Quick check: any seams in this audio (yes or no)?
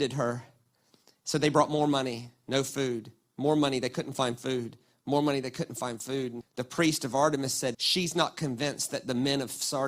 yes